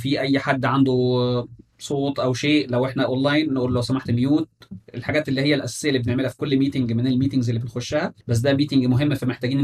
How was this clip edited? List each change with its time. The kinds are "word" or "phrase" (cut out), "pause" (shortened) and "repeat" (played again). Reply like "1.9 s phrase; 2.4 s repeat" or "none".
8.2 s pause